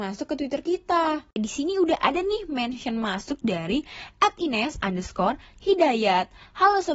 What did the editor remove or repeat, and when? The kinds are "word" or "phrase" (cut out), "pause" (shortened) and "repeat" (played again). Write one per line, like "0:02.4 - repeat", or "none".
none